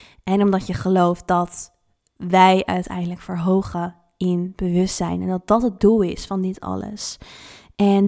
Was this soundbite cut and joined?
no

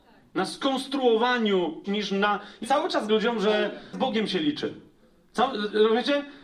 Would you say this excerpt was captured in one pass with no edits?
no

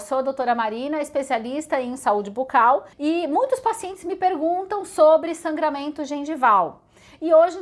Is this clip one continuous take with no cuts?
no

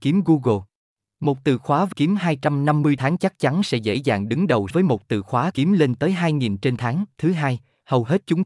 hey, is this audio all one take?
no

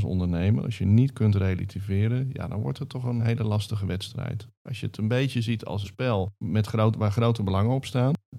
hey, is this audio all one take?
no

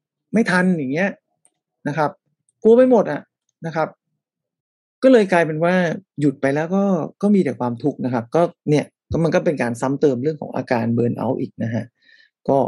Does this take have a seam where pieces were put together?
yes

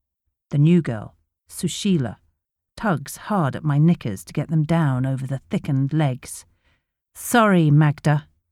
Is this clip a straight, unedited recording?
yes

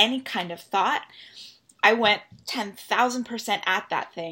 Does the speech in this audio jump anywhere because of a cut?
no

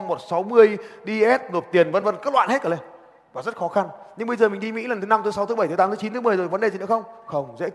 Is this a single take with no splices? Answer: yes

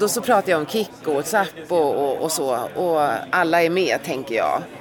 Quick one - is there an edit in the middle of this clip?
no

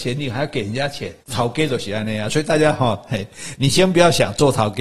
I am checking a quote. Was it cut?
yes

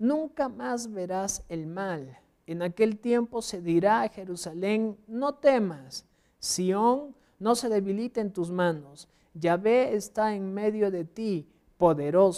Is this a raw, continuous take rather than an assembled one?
yes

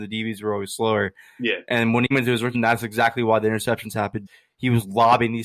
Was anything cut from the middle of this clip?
yes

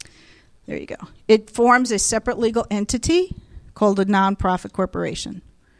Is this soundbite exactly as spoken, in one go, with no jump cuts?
yes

